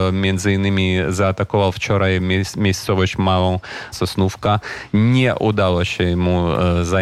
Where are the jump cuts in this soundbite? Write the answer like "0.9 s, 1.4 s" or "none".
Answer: 3.9 s